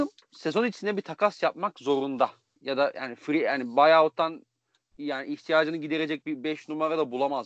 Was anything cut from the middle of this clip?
yes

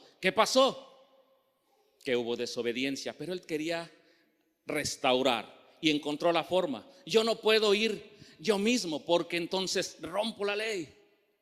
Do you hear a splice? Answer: no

